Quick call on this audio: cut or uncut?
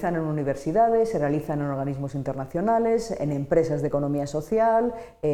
uncut